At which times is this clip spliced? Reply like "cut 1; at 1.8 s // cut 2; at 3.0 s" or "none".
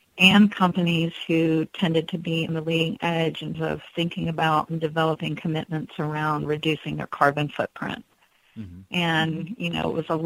cut 1; at 2.5 s // cut 2; at 3.5 s

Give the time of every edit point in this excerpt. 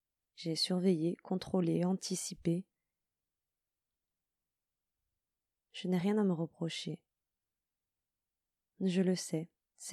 none

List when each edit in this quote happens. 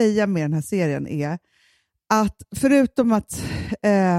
none

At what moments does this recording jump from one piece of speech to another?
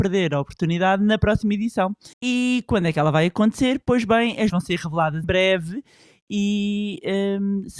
cut 1; at 2.1 s // cut 2; at 4.5 s // cut 3; at 5.2 s

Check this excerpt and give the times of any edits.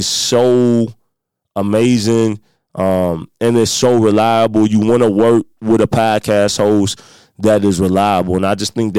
none

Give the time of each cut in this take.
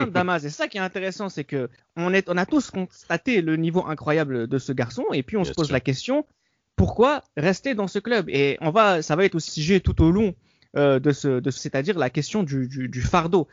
cut 1; at 9.5 s // cut 2; at 11.6 s

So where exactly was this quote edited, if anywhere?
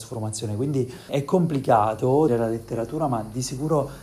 cut 1; at 1.1 s // cut 2; at 2.3 s

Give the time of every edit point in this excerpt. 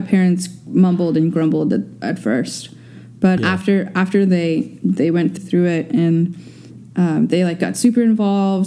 cut 1; at 3.4 s // cut 2; at 5.4 s

